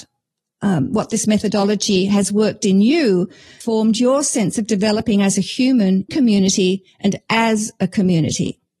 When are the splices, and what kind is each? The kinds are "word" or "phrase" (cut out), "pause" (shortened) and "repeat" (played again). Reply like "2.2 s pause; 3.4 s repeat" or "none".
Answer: 3.6 s phrase; 6.1 s word